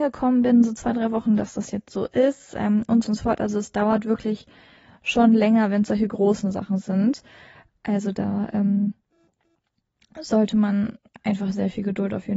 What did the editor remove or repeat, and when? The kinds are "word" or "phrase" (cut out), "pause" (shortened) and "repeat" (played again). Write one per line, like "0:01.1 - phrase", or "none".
0:03.0 - word